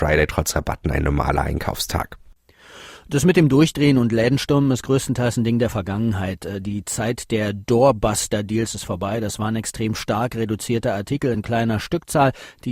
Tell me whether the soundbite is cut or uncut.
uncut